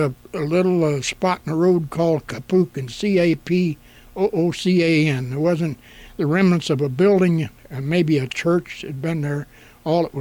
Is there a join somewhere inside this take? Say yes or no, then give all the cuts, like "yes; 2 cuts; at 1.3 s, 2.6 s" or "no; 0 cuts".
no; 0 cuts